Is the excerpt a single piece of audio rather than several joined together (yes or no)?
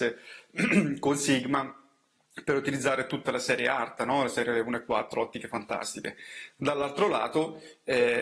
yes